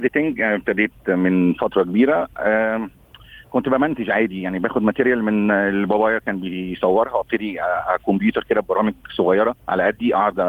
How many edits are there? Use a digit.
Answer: 1